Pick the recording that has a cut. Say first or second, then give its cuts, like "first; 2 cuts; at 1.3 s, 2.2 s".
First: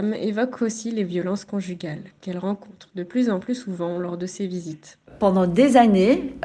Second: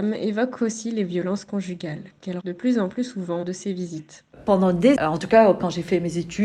second; 3 cuts; at 2.4 s, 3.4 s, 5.0 s